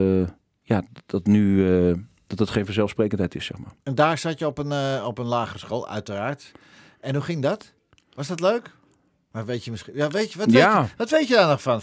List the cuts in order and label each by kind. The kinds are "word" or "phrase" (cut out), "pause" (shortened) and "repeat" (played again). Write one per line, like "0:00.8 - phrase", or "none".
none